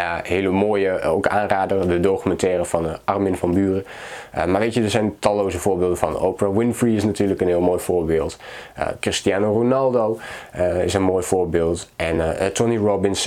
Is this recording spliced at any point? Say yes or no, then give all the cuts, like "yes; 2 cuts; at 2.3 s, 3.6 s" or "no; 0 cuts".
no; 0 cuts